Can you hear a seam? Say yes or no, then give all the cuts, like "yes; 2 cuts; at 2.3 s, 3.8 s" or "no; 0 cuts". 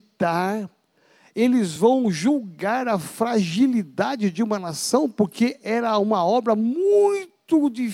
no; 0 cuts